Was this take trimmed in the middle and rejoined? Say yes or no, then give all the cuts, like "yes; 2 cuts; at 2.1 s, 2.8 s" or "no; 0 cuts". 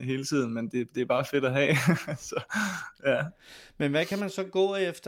no; 0 cuts